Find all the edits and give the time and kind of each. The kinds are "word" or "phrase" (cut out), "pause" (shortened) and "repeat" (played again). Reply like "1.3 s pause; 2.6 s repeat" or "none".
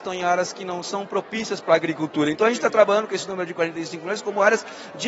none